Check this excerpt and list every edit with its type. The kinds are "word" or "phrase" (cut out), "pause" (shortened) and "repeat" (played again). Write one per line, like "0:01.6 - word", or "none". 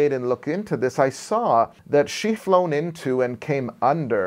0:01.8 - pause
0:02.4 - word